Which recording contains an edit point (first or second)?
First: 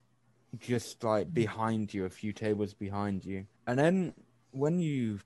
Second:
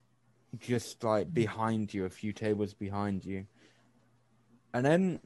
first